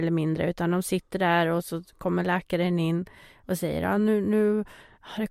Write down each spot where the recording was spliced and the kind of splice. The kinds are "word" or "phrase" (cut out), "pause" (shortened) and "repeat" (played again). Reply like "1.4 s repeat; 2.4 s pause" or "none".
none